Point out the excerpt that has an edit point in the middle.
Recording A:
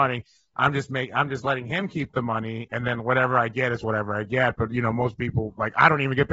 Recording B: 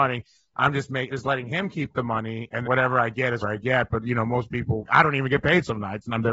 B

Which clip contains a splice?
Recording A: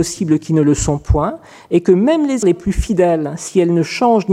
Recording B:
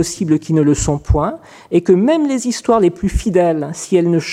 A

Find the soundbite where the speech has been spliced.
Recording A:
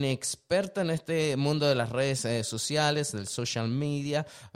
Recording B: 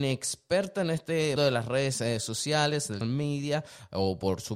B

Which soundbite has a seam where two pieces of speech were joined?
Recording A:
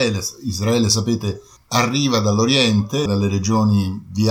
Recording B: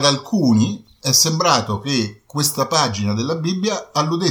A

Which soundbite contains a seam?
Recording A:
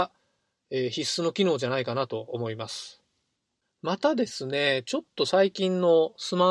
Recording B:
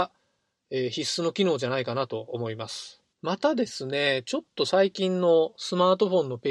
B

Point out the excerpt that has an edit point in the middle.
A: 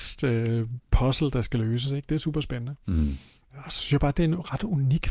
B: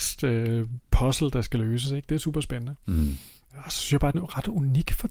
B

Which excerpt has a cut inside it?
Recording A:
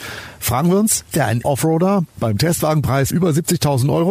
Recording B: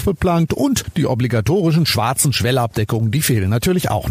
A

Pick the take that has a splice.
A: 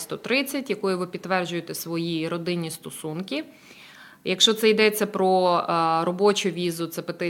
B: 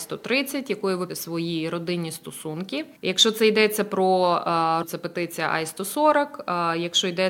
B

